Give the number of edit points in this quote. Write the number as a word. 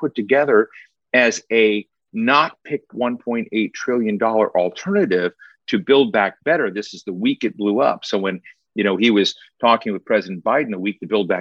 one